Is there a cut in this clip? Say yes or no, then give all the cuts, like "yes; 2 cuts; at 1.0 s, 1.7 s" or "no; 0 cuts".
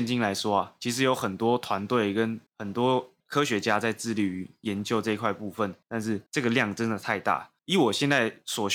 yes; 5 cuts; at 2.5 s, 3.2 s, 5.8 s, 6.3 s, 7.6 s